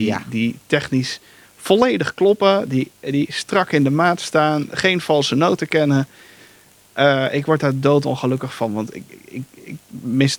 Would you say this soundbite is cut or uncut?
uncut